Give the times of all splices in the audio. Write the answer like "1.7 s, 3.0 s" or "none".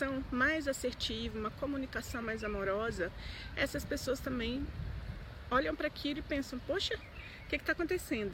none